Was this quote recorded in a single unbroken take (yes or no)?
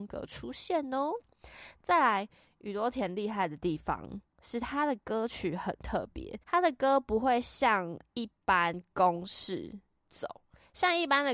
no